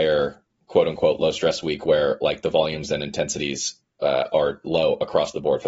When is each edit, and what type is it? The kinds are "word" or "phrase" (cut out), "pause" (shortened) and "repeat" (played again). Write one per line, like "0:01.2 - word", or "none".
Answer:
none